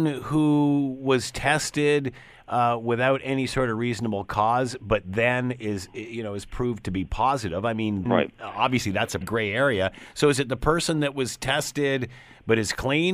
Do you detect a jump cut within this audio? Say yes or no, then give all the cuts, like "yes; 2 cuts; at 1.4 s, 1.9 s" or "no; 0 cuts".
yes; 2 cuts; at 8.1 s, 9.2 s